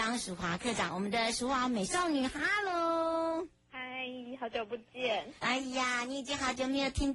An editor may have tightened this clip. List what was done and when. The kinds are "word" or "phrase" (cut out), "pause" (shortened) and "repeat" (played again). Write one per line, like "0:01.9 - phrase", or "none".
0:03.6 - pause
0:05.4 - pause